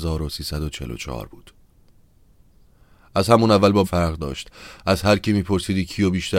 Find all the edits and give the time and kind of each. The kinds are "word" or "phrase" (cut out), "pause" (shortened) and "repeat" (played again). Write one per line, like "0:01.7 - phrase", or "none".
0:03.8 - word